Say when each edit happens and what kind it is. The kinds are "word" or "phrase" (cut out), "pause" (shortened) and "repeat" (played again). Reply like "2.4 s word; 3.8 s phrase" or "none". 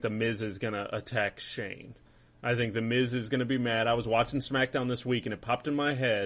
none